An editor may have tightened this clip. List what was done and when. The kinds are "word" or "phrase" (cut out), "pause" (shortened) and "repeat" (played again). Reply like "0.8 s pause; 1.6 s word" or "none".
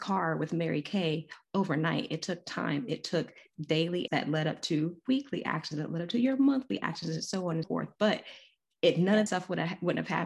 4.1 s word; 7.6 s word; 9.3 s word